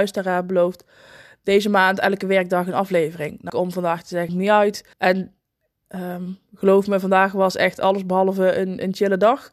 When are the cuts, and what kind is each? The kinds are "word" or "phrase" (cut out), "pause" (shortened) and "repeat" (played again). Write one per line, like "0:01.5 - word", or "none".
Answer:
0:03.5 - phrase
0:04.3 - phrase
0:04.9 - pause

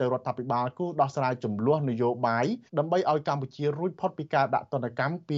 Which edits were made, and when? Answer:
0:02.7 - pause

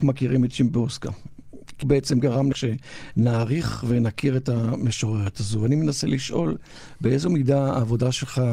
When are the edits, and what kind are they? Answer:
0:01.8 - word
0:02.5 - word

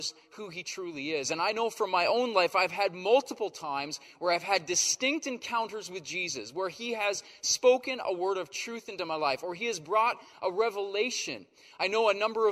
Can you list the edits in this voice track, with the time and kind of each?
none

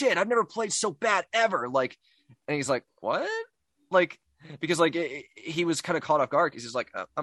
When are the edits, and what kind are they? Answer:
none

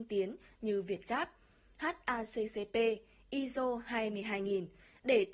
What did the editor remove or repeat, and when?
none

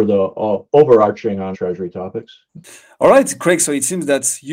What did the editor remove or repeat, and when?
0:01.5 - word

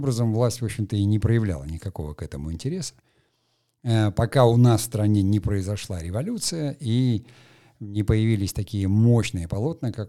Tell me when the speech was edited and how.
none

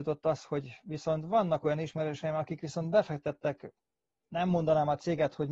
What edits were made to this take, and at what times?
none

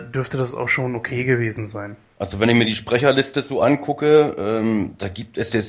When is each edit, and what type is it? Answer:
none

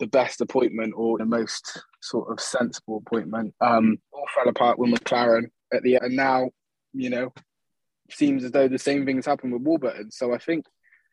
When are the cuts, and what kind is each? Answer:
0:01.2 - word
0:04.0 - pause
0:06.0 - word

